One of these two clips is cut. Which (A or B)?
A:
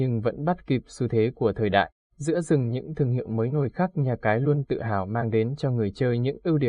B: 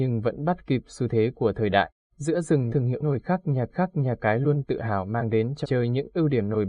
B